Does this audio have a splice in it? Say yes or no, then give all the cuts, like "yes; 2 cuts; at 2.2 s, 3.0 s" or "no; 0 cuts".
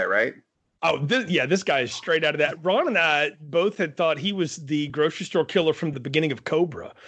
no; 0 cuts